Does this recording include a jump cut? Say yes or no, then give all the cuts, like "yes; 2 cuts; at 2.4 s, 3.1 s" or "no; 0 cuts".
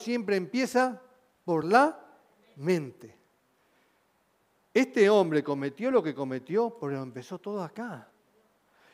no; 0 cuts